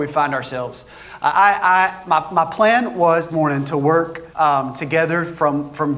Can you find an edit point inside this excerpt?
yes; 2 cuts; at 3.3 s, 4.3 s

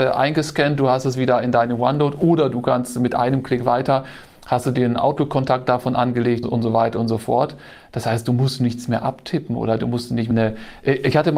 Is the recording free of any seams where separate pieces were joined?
no; 2 cuts; at 6.4 s, 10.3 s

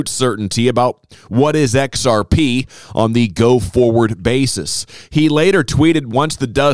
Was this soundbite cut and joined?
no; 0 cuts

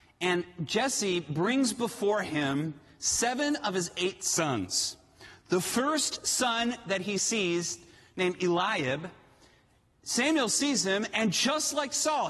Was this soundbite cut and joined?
no; 0 cuts

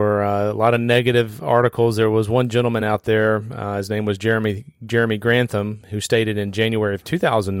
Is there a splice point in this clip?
no; 0 cuts

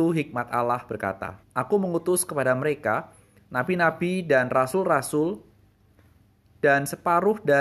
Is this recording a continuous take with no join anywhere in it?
no; 1 cut; at 1.4 s

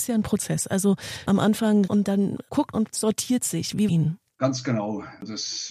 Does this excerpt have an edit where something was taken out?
yes; 3 cuts; at 1.9 s, 2.7 s, 3.9 s

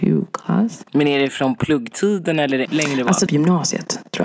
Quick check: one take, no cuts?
no; 2 cuts; at 2.6 s, 3.3 s

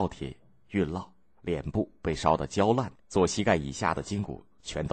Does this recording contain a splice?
yes; 1 cut; at 3.0 s

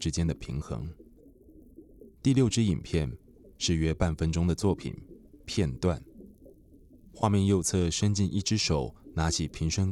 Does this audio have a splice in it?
no; 0 cuts

